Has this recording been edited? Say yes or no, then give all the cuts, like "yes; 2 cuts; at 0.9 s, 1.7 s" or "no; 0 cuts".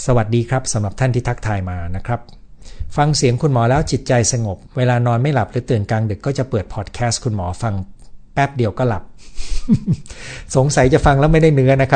no; 0 cuts